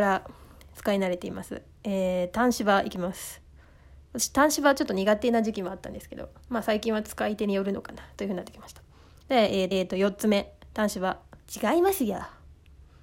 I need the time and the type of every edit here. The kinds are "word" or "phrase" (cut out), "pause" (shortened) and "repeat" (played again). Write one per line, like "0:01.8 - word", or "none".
0:09.7 - repeat
0:11.4 - pause

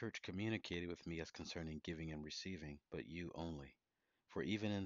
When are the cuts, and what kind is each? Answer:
0:02.9 - pause

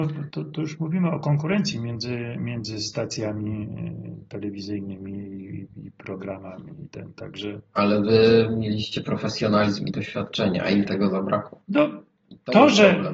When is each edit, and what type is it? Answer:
0:11.6 - pause

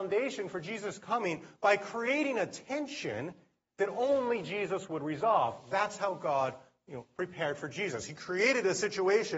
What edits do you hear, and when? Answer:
none

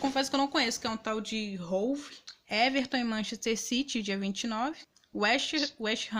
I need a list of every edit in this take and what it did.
none

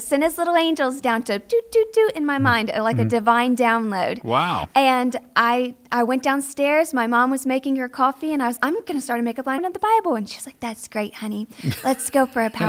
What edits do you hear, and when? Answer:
0:08.6 - word
0:09.6 - phrase

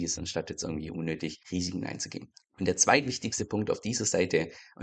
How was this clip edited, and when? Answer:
0:01.4 - pause

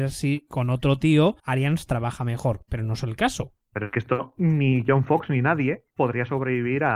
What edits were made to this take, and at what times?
0:01.4 - pause
0:03.6 - pause
0:05.9 - pause

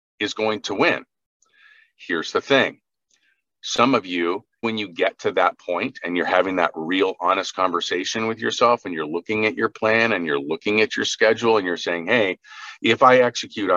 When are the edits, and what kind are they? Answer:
0:04.6 - word

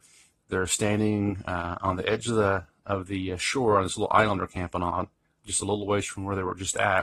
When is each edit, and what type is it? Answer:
none

